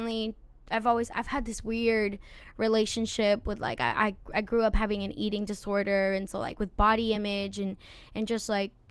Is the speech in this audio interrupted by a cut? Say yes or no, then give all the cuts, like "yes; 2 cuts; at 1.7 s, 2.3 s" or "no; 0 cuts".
no; 0 cuts